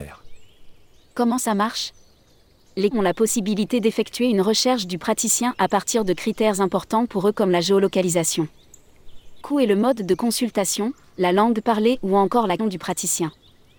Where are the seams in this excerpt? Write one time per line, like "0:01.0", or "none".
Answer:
0:02.9
0:09.4
0:12.6